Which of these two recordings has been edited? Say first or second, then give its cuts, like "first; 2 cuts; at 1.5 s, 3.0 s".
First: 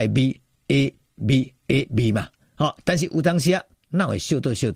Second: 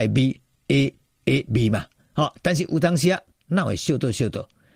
second; 1 cut; at 1.1 s